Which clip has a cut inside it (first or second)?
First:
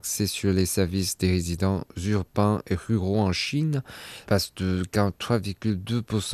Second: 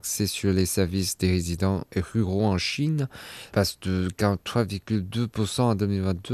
second